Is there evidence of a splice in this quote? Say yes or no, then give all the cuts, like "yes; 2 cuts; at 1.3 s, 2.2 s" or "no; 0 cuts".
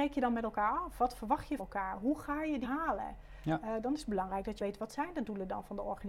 yes; 3 cuts; at 1.6 s, 2.6 s, 4.6 s